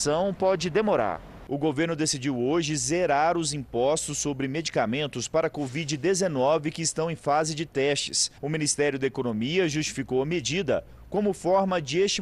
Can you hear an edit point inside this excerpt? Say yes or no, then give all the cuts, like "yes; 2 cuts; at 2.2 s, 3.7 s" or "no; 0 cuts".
yes; 1 cut; at 8.4 s